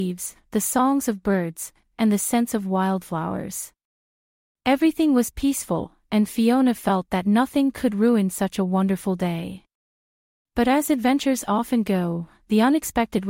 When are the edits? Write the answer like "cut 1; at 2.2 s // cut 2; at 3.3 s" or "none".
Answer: none